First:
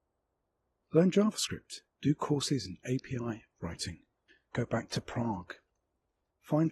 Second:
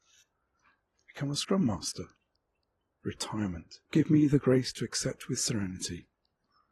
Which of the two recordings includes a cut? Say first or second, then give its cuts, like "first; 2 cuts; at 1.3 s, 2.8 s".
second; 1 cut; at 3.8 s